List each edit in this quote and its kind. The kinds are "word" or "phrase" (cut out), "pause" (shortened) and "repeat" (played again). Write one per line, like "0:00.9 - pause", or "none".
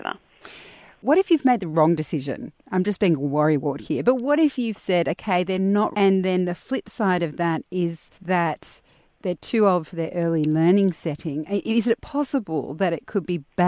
0:05.9 - word
0:08.1 - pause